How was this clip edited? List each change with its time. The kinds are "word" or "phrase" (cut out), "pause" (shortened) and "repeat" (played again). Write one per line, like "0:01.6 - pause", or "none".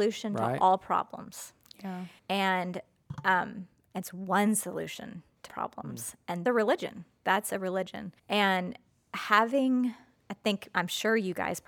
0:02.2 - pause
0:05.5 - word
0:06.5 - phrase
0:08.2 - pause

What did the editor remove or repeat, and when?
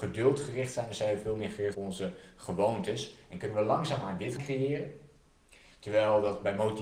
0:01.7 - word
0:04.4 - word

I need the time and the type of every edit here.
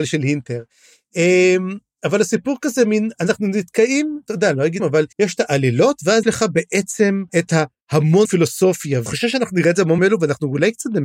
0:04.8 - word
0:05.1 - pause
0:06.2 - word
0:07.3 - pause
0:08.2 - word
0:09.1 - word
0:10.0 - word

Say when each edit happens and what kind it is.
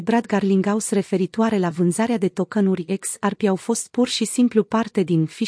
none

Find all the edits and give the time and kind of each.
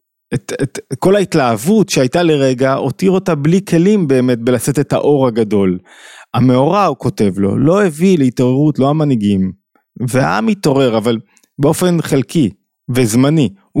none

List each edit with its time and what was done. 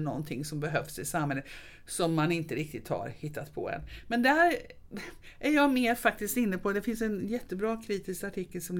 none

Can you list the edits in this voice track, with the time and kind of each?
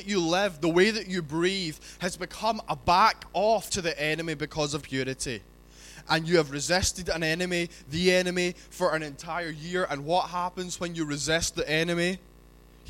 0:03.7 - word
0:04.8 - word

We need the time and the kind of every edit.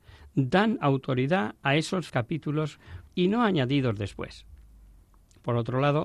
0:02.1 - word
0:03.1 - phrase

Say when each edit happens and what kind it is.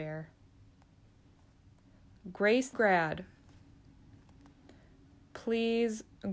0:02.7 - word

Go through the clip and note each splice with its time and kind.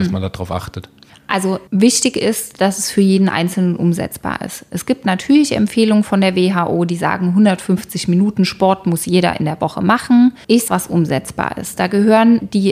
0:10.7 - phrase

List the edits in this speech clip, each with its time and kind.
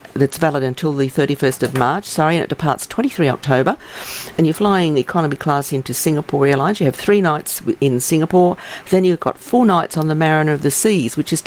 none

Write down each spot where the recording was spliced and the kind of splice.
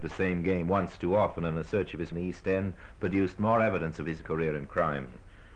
0:02.1 - phrase
0:04.2 - word

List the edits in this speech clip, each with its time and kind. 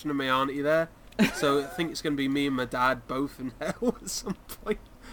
none

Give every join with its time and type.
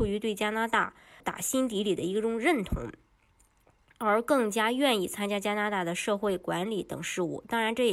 0:01.2 - word

